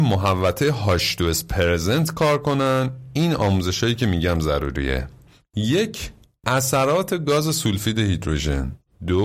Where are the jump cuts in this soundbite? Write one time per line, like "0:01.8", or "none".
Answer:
none